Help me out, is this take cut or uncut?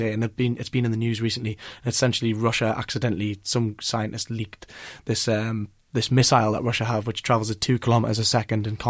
uncut